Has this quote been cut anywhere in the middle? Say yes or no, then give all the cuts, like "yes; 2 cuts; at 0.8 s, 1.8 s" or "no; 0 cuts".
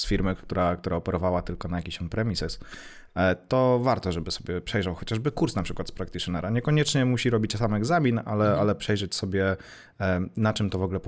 no; 0 cuts